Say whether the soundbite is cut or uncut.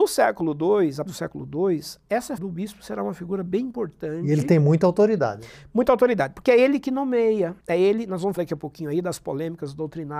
cut